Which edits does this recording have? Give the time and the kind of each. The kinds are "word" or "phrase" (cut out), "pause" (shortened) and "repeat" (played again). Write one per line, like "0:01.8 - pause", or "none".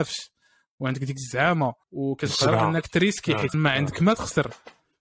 0:01.8 - pause
0:03.5 - word